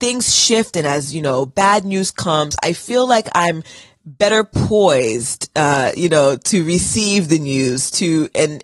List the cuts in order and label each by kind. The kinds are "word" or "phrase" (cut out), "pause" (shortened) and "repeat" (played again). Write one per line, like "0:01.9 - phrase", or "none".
none